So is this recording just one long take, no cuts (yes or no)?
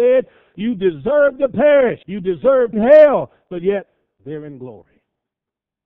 no